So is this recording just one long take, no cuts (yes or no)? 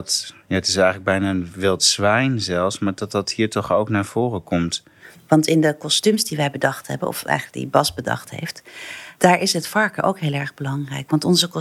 yes